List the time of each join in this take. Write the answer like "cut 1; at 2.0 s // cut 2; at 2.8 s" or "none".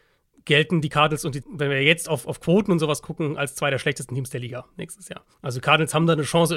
cut 1; at 1.4 s // cut 2; at 2.2 s // cut 3; at 5.3 s